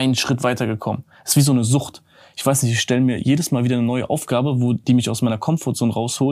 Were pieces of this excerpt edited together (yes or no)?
no